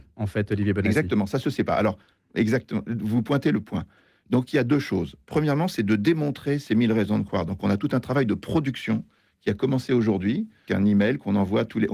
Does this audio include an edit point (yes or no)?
yes